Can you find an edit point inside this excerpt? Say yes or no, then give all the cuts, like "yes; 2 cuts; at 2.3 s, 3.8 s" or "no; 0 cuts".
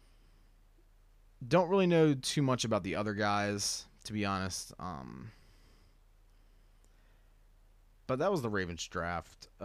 no; 0 cuts